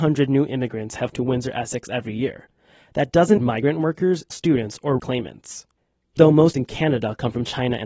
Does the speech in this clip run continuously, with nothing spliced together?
no; 6 cuts; at 1.1 s, 3.4 s, 4.3 s, 5.0 s, 6.2 s, 6.5 s

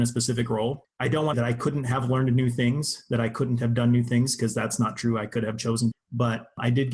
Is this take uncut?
no; 3 cuts; at 0.9 s, 1.3 s, 5.9 s

